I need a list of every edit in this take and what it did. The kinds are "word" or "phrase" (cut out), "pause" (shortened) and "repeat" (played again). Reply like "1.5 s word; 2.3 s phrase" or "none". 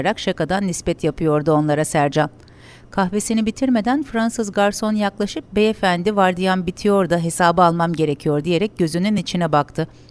none